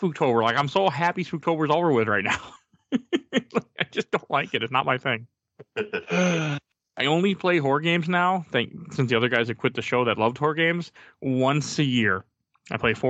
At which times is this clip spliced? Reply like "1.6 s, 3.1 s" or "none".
none